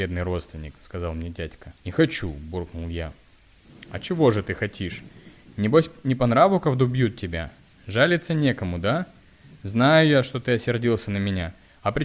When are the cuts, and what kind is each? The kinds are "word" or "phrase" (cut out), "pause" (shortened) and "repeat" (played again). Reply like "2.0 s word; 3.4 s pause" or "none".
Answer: 1.8 s pause